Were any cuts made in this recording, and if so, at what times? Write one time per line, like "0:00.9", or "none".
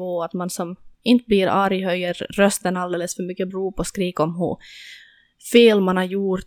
0:00.9
0:03.5